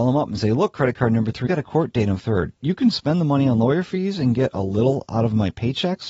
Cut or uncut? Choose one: cut